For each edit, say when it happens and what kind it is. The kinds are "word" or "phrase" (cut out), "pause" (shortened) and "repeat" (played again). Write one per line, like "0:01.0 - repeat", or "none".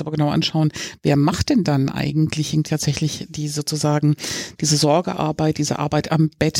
0:02.7 - word